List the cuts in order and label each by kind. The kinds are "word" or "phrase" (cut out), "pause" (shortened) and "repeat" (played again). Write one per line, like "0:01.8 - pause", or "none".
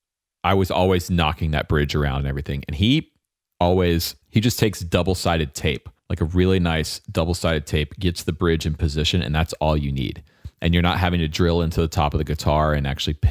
0:04.2 - pause
0:06.0 - pause